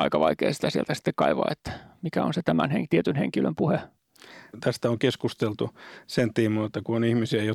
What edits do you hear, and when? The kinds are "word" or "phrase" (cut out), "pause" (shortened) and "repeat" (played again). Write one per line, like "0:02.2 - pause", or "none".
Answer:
none